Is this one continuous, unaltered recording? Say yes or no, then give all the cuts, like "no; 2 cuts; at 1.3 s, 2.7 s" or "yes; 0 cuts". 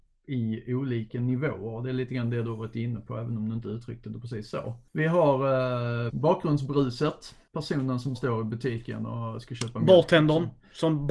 no; 2 cuts; at 6.1 s, 8.1 s